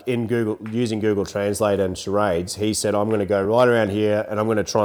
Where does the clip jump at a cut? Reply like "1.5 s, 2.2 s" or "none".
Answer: none